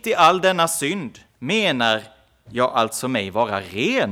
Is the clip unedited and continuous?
no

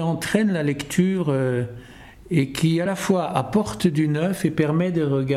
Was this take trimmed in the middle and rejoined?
no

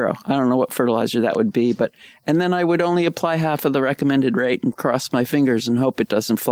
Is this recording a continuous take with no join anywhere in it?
yes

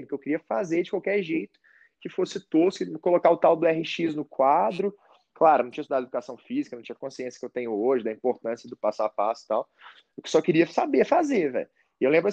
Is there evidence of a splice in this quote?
no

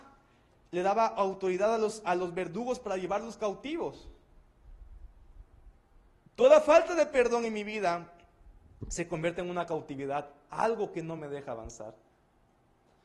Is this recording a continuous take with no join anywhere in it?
yes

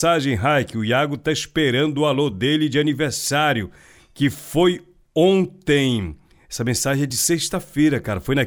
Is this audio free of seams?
yes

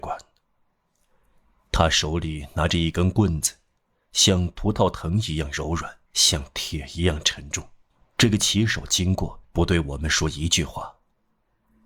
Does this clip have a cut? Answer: yes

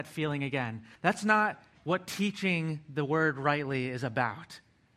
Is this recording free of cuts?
no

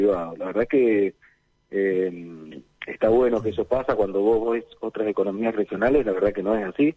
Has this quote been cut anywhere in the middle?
no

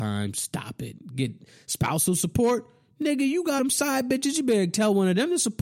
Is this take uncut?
no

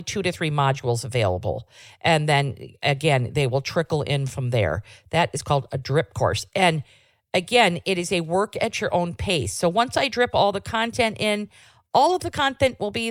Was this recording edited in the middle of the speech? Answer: no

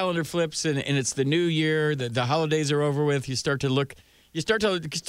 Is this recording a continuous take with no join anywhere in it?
yes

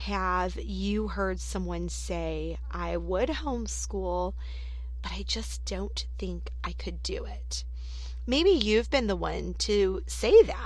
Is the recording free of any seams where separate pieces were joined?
yes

